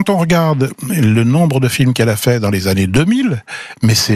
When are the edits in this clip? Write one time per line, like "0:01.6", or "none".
none